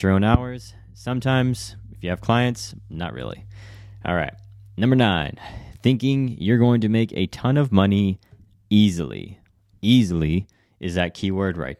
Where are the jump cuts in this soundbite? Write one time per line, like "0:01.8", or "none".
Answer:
none